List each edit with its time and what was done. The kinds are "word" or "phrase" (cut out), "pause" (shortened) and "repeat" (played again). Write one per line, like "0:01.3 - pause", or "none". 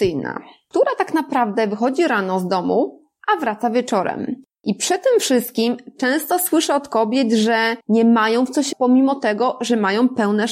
0:07.8 - pause
0:08.7 - word